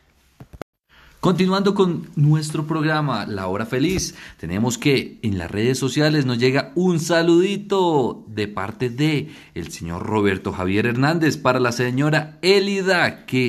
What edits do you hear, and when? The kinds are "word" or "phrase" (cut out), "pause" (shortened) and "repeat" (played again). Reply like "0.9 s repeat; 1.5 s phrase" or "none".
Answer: none